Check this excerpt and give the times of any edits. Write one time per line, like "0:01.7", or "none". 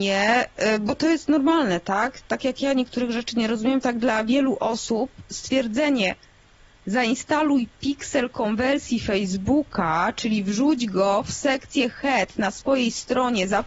none